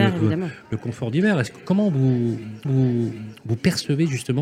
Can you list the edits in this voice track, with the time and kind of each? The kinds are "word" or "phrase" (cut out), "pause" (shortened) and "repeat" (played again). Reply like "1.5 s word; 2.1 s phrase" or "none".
2.6 s repeat